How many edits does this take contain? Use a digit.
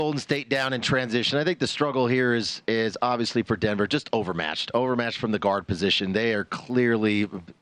0